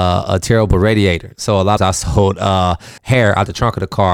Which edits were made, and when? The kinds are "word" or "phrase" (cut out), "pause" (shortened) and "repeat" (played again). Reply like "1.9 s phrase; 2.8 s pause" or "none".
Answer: 1.8 s phrase; 3.0 s pause